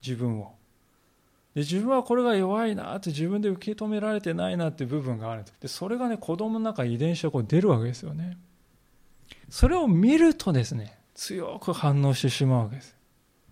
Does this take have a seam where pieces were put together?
yes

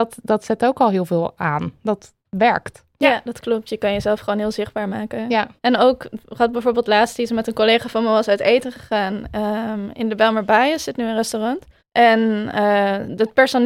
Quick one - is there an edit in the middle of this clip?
yes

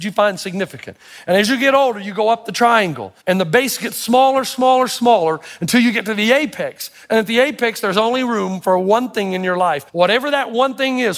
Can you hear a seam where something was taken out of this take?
yes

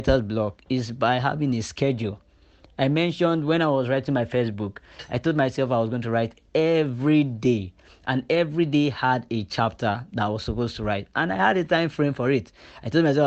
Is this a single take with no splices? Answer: yes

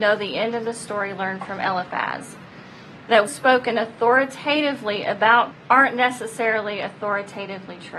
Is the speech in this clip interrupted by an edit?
yes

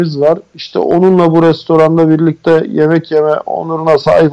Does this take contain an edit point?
no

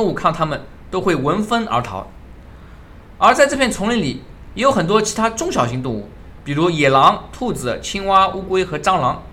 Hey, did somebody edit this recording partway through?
no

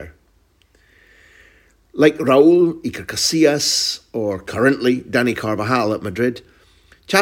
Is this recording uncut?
yes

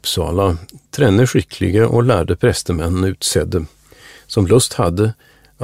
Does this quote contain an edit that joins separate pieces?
no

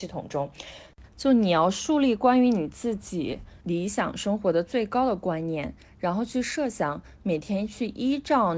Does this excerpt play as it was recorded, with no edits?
no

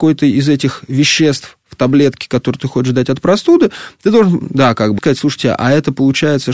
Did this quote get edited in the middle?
yes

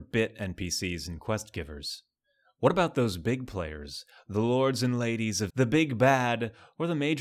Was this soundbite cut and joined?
yes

